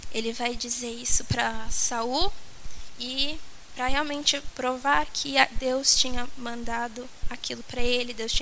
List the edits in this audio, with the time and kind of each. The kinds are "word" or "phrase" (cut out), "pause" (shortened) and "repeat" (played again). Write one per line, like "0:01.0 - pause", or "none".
none